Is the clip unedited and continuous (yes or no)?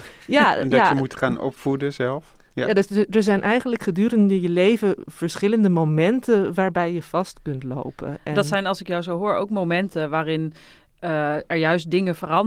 yes